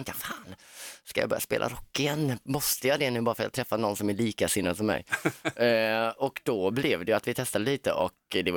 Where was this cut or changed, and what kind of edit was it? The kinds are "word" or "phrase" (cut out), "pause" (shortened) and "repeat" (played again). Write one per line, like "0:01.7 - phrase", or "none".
none